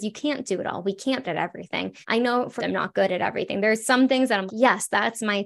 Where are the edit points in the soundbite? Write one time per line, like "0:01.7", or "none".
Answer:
0:01.2
0:02.0
0:02.6
0:04.5